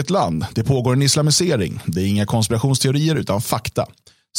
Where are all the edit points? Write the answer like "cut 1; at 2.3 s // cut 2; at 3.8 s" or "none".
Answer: none